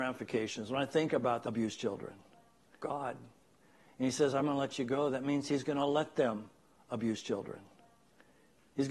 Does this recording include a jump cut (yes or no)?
no